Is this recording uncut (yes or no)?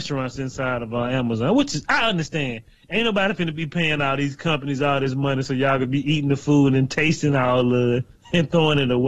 yes